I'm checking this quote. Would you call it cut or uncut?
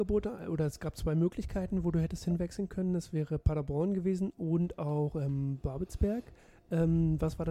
uncut